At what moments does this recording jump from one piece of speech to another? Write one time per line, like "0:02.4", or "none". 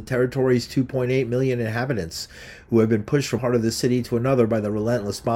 0:03.4